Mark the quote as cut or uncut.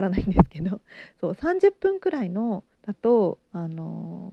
cut